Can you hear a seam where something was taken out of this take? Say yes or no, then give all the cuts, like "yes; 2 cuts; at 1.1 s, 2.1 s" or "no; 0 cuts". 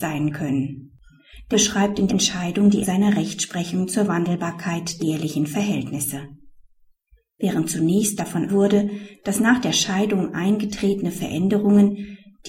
yes; 6 cuts; at 1.5 s, 2.1 s, 2.8 s, 5.0 s, 8.2 s, 8.5 s